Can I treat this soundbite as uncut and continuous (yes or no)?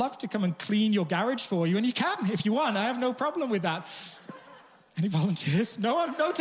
yes